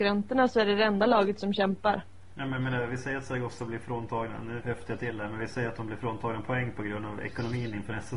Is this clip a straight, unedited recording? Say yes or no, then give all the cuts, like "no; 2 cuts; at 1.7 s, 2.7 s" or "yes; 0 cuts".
no; 1 cut; at 4.6 s